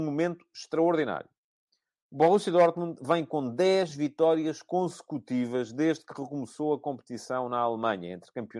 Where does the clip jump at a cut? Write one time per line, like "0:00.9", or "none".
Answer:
none

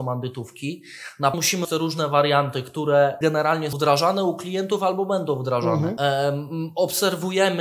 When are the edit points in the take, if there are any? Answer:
0:01.3
0:01.6
0:03.7

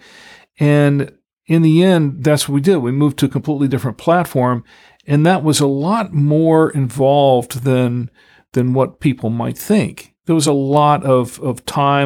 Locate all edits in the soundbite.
none

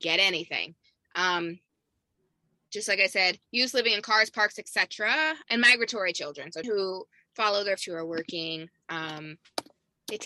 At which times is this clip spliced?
0:03.4
0:05.4
0:06.6
0:07.8

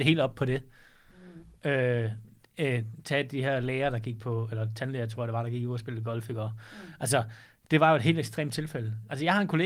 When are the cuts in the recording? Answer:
none

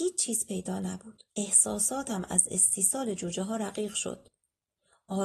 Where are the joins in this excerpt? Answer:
0:01.3

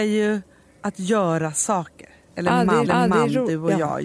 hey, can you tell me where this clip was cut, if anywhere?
0:02.9

